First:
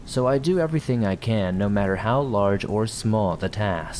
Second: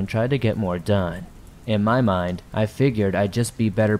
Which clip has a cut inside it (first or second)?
second